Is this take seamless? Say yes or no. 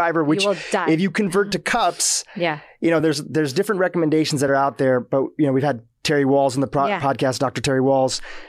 yes